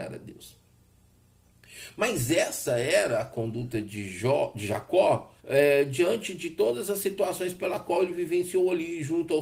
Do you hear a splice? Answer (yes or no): yes